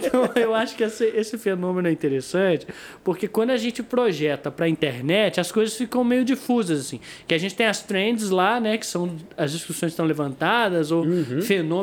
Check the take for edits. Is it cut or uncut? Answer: uncut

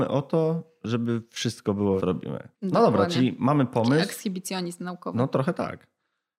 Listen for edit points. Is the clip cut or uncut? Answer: cut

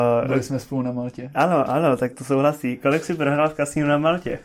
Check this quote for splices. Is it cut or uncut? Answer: cut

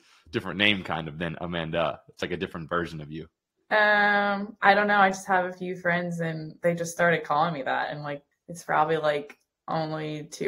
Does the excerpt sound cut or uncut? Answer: cut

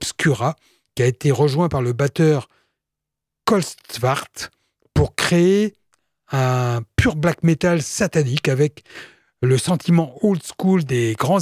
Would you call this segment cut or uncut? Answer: uncut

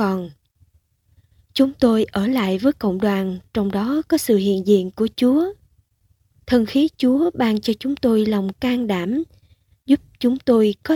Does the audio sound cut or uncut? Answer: uncut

